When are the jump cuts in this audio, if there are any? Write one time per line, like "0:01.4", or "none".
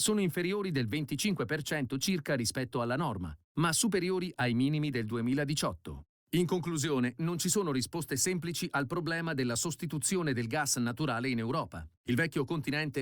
none